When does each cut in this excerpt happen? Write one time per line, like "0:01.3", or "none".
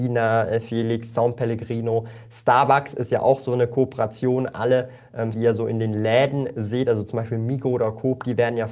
0:05.3